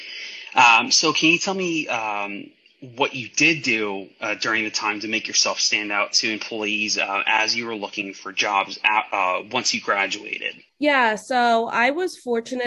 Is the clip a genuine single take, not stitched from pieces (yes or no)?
no